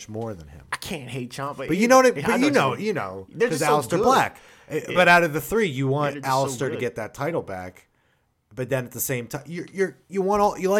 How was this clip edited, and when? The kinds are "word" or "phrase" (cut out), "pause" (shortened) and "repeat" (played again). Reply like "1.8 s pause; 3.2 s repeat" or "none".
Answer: none